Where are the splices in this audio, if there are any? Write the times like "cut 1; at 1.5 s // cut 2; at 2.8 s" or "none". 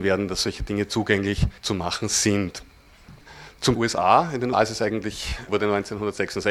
cut 1; at 1.6 s // cut 2; at 3.7 s // cut 3; at 4.5 s

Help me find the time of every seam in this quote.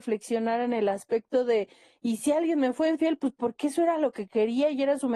none

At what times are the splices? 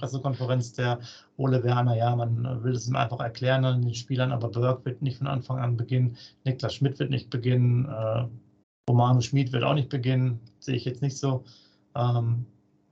cut 1; at 8.6 s

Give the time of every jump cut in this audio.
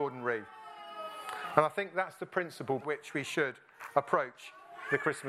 cut 1; at 2.8 s

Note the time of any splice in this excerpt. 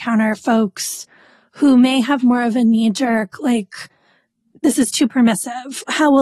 none

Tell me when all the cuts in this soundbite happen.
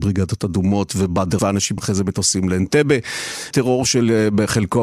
cut 1; at 1.4 s // cut 2; at 1.8 s // cut 3; at 3.5 s

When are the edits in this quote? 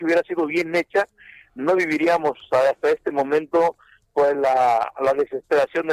none

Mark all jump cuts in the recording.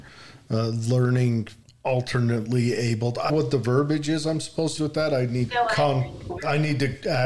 cut 1; at 1.6 s // cut 2; at 3.3 s // cut 3; at 4.8 s // cut 4; at 5.5 s

